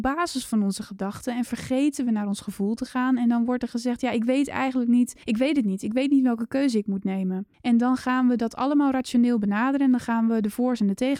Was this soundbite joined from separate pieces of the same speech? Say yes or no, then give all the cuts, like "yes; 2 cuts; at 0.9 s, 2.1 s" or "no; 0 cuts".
yes; 2 cuts; at 5.2 s, 7.5 s